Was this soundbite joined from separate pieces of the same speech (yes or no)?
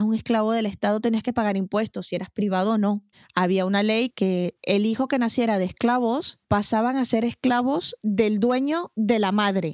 no